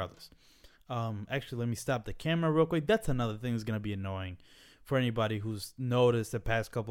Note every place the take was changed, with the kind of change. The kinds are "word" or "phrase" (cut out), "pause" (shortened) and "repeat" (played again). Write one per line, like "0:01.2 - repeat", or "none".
none